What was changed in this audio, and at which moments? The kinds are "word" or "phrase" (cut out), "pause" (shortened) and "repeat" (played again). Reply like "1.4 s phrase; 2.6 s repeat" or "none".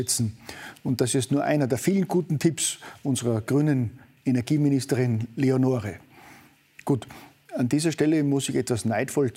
none

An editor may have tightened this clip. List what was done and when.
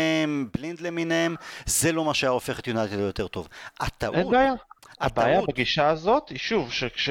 none

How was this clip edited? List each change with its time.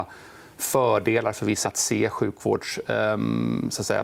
1.6 s word

